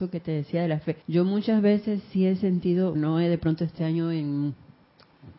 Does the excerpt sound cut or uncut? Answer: cut